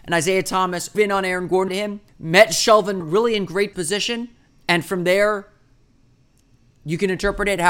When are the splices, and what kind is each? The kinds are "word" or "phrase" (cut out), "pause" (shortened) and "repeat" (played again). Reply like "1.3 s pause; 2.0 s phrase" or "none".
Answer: 0.9 s word; 1.7 s phrase; 2.1 s pause; 3.0 s phrase; 3.7 s word; 4.5 s pause